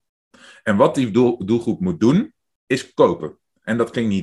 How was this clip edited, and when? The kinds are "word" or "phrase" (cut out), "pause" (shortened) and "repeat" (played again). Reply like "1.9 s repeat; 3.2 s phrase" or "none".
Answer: none

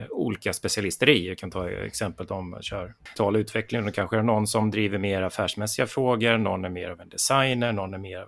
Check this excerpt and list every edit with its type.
none

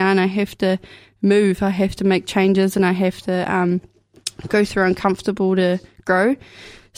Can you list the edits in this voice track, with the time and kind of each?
none

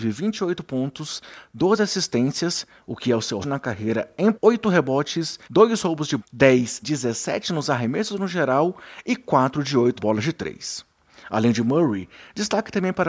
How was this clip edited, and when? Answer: 3.4 s word; 4.3 s word; 5.4 s pause; 6.2 s word; 6.8 s word; 10.0 s word

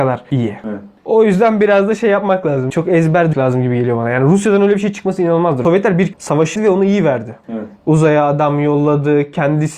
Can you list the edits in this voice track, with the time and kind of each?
2.7 s word; 3.3 s word; 6.1 s word; 6.6 s word

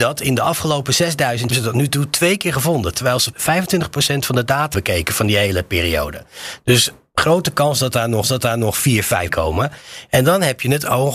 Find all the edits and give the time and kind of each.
1.5 s phrase; 3.3 s word; 4.7 s word; 8.2 s repeat; 9.3 s word

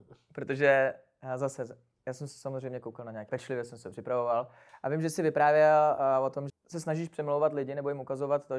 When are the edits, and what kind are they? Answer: 3.3 s word; 6.5 s word

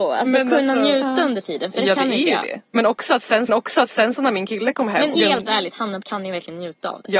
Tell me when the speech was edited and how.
3.5 s repeat; 5.1 s phrase; 6.0 s word

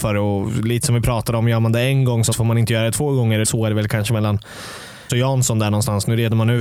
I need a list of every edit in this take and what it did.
2.3 s word; 3.4 s word; 5.1 s word

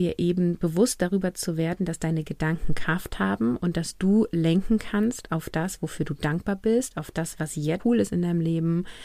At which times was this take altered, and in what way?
7.8 s word

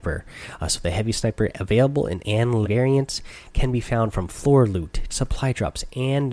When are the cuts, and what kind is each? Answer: 1.5 s word; 2.2 s word; 2.6 s word; 5.1 s word

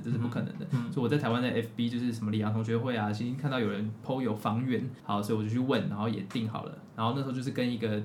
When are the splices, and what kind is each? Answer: 5.0 s pause

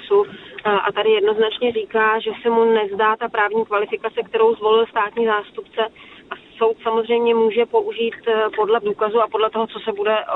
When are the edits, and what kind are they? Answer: 8.8 s word

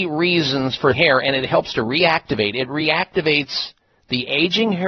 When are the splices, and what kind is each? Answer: 0.9 s word

